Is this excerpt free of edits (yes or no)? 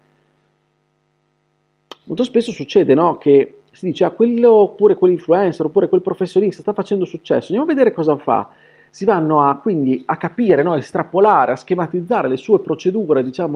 yes